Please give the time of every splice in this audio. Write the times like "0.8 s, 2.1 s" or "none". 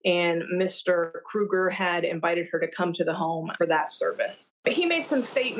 3.6 s

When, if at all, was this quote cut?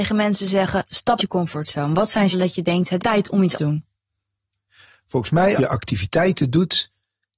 1.2 s, 2.3 s, 3.0 s, 3.5 s, 5.6 s

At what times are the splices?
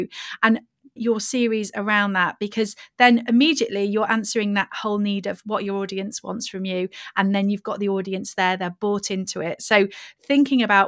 1.0 s

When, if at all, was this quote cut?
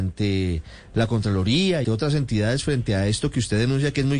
1.8 s

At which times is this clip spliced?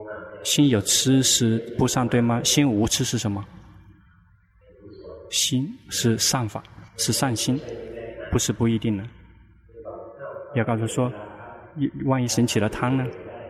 6.9 s

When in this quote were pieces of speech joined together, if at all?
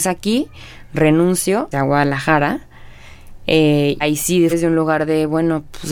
1.7 s, 4.0 s, 4.5 s

